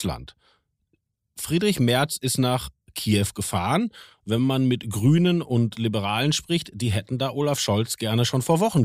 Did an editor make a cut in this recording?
no; 0 cuts

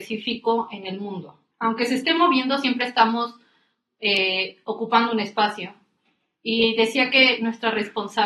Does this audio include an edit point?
yes; 1 cut; at 1.5 s

